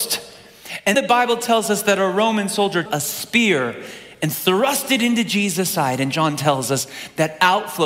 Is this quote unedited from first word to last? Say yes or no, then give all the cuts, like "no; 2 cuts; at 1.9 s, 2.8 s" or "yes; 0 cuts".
no; 2 cuts; at 0.9 s, 2.9 s